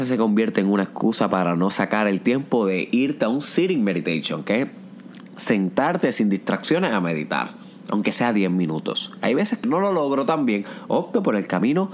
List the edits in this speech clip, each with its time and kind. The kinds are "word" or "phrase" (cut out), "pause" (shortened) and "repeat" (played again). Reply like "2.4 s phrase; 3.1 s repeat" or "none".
9.6 s word